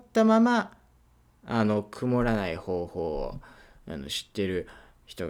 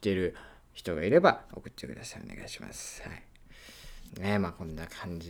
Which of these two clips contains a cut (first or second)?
second